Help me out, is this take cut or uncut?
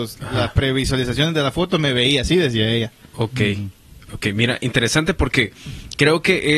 uncut